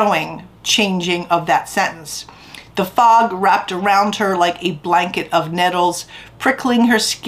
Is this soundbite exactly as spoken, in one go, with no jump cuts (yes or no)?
yes